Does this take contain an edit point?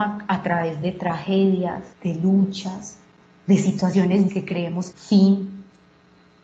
yes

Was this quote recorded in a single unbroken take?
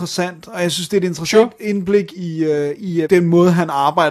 no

